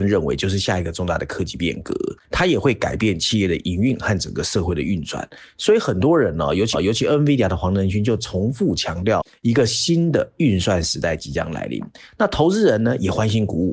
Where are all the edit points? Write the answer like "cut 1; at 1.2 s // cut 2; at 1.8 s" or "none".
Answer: cut 1; at 2.2 s // cut 2; at 6.7 s